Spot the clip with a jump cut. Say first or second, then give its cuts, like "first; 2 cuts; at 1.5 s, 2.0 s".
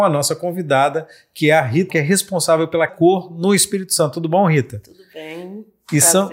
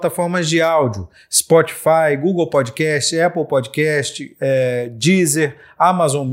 first; 2 cuts; at 1.9 s, 2.9 s